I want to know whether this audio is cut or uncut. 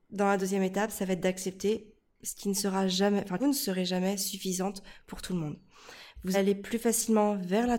cut